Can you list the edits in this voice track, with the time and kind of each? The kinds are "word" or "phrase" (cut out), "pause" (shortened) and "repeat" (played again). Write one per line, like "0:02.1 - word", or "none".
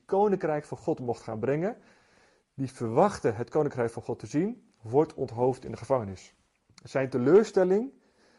none